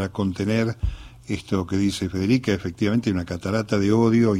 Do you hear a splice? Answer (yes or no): no